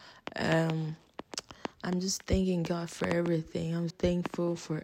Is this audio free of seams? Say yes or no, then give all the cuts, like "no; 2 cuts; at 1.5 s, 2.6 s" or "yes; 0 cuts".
no; 2 cuts; at 1.7 s, 3.9 s